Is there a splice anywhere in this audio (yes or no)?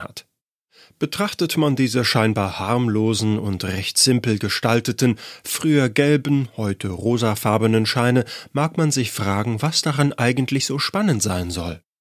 no